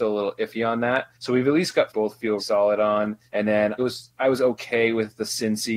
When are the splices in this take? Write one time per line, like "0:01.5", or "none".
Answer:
0:01.1
0:01.9
0:02.4
0:03.3
0:03.8